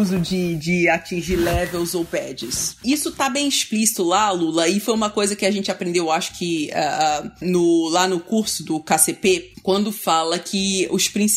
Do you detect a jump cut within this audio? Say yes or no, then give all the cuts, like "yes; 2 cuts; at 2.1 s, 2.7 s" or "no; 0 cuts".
no; 0 cuts